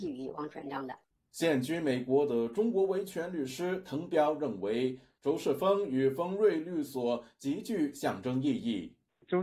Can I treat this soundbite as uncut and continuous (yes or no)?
yes